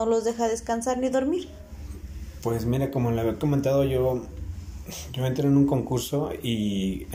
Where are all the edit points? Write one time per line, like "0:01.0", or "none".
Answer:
none